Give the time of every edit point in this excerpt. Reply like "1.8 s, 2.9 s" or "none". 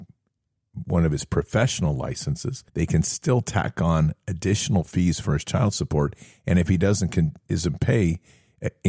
2.7 s